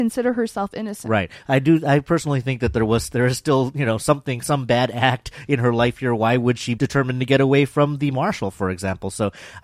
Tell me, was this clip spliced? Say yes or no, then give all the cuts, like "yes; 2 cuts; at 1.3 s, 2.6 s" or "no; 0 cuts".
yes; 1 cut; at 6.8 s